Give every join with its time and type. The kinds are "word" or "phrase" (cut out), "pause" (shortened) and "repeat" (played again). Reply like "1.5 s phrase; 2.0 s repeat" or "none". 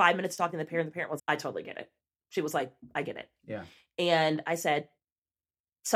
1.2 s word